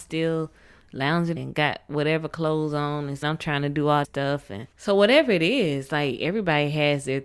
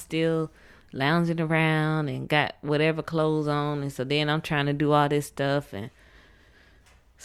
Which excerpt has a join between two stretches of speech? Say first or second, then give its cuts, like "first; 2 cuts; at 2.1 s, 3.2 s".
first; 4 cuts; at 1.4 s, 3.2 s, 4.0 s, 4.7 s